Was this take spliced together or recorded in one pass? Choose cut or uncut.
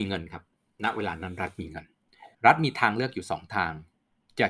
cut